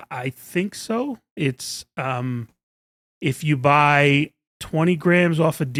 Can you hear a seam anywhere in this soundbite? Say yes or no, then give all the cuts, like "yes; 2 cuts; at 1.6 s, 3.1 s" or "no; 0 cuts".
no; 0 cuts